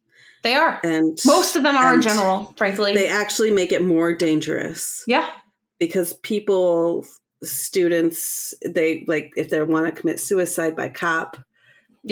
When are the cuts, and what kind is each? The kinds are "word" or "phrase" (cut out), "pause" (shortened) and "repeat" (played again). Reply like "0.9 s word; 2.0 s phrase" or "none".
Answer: none